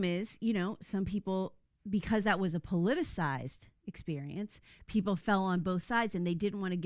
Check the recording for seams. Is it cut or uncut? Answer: uncut